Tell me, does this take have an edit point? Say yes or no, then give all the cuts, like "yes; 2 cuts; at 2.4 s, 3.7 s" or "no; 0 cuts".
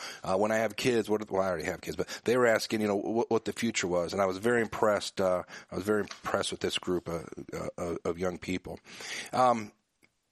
no; 0 cuts